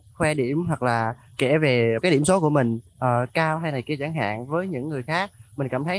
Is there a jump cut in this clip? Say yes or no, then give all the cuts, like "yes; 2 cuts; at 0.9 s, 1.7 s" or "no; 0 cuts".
yes; 2 cuts; at 1.3 s, 2.9 s